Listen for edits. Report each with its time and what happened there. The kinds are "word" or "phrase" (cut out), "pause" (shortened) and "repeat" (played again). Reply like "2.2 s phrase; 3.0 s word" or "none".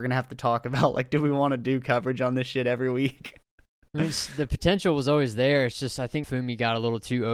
6.2 s word